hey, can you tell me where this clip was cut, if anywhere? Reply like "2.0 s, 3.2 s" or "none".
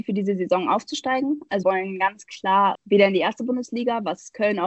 1.6 s, 2.7 s